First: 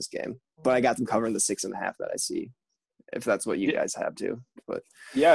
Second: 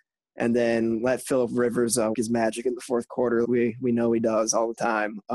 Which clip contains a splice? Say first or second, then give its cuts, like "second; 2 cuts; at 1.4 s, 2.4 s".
second; 2 cuts; at 2.1 s, 3.4 s